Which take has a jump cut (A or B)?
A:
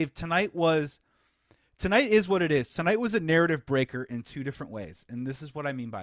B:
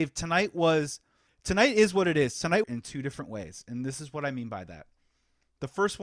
B